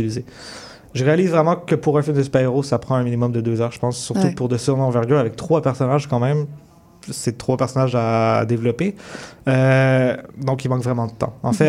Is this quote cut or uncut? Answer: cut